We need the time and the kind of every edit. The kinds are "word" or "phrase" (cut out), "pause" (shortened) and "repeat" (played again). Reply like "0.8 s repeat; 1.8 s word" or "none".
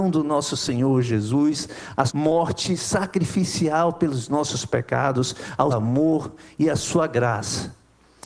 2.1 s word; 5.7 s word